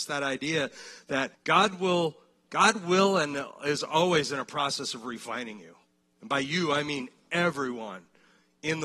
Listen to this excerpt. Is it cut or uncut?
cut